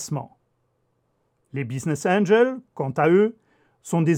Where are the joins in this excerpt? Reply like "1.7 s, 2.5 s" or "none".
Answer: none